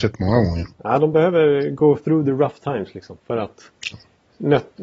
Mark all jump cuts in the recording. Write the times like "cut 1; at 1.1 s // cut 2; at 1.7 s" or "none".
none